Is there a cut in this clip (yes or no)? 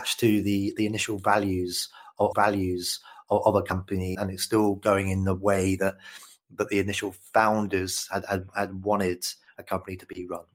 yes